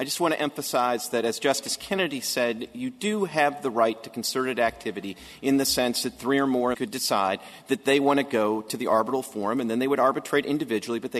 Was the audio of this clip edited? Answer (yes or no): yes